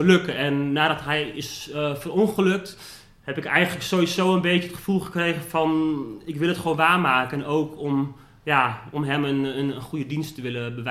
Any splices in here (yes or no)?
no